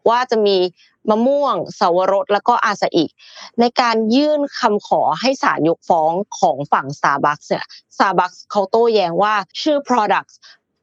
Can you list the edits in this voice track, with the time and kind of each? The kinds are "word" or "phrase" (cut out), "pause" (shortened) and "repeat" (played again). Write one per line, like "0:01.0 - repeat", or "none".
0:09.5 - pause

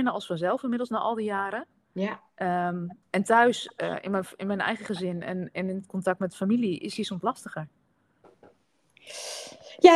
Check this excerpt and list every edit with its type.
0:03.0 - pause

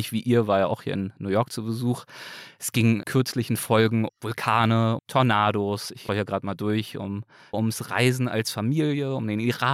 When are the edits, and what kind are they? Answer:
0:03.0 - word
0:04.1 - word
0:05.0 - word
0:06.1 - word
0:07.5 - word

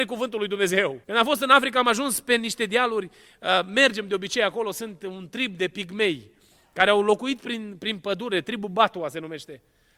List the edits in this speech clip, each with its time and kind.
0:01.0 - pause

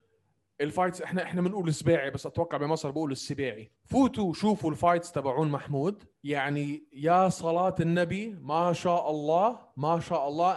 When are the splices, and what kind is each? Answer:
0:03.8 - pause
0:06.1 - pause

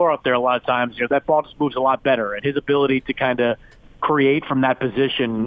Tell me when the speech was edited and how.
none

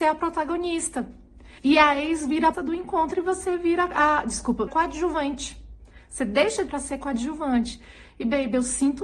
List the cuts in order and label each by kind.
0:01.6 - pause
0:02.5 - word
0:04.7 - phrase
0:06.7 - phrase

